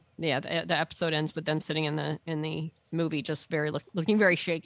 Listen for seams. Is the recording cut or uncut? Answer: uncut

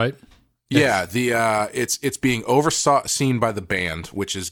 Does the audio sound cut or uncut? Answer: uncut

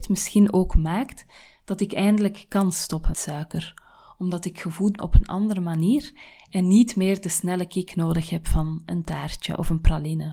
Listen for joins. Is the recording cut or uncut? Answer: cut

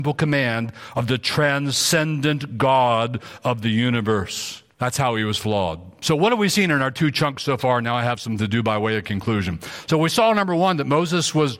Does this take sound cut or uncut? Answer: cut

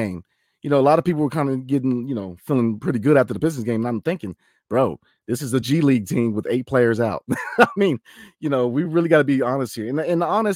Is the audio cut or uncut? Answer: uncut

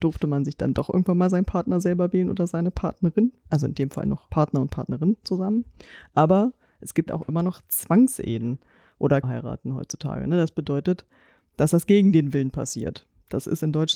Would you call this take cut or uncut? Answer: cut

